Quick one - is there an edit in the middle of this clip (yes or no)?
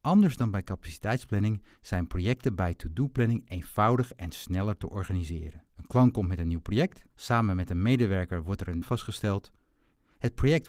yes